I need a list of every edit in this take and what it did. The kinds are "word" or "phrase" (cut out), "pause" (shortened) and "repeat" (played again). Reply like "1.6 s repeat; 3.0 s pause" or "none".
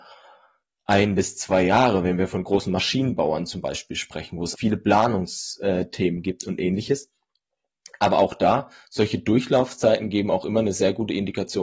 4.5 s word

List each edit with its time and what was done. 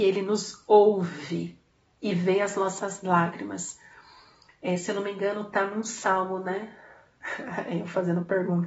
none

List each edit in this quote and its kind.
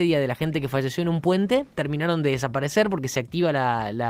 1.7 s pause

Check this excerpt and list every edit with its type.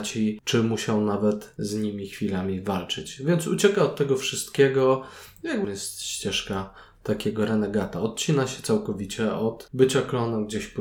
5.6 s phrase

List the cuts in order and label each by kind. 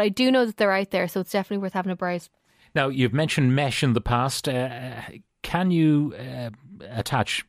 none

